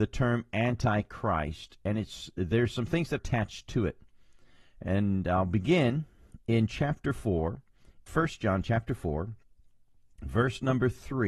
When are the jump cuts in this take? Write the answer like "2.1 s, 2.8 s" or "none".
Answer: 3.2 s, 8.1 s